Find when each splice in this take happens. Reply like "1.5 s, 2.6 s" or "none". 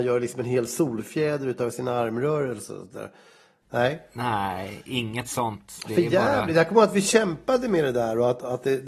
none